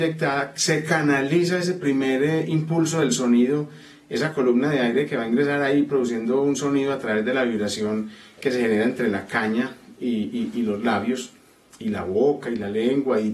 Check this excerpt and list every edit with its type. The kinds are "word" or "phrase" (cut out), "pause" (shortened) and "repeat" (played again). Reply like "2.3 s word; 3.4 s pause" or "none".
none